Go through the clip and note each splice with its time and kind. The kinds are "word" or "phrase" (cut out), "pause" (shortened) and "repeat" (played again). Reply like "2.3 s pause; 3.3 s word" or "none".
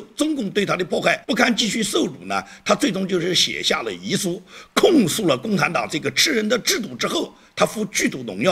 1.2 s pause